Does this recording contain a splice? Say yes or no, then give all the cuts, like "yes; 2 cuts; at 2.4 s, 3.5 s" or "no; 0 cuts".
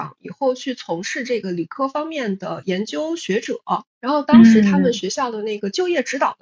no; 0 cuts